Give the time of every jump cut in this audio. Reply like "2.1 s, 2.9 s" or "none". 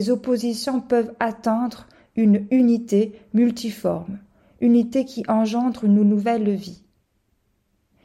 none